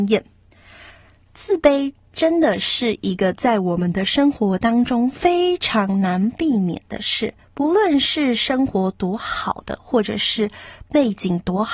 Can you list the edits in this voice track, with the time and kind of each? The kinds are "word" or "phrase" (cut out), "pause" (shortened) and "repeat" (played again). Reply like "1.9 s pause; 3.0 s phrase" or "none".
7.4 s pause